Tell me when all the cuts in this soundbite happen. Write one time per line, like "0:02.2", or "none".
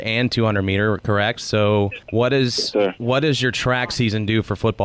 0:02.0